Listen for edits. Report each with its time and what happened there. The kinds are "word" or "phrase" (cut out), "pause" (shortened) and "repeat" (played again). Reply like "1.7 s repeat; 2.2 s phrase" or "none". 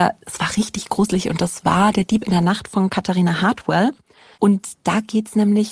none